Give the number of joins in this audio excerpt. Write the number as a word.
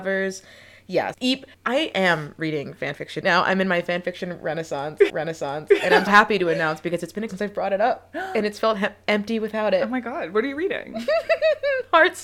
six